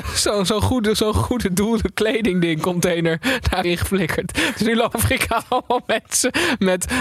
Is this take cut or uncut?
cut